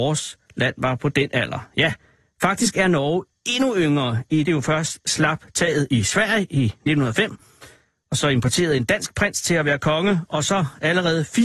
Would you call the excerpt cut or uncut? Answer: cut